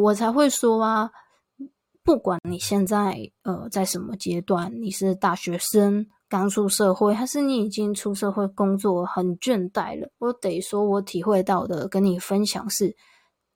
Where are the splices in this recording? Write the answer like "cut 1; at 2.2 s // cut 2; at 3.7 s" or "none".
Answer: cut 1; at 10.1 s